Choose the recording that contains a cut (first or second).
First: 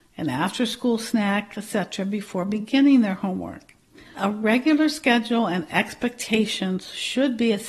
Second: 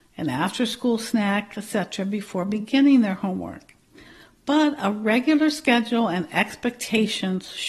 first